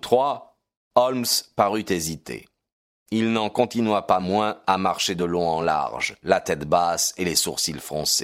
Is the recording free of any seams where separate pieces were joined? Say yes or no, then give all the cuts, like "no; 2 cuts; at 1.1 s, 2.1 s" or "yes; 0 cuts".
yes; 0 cuts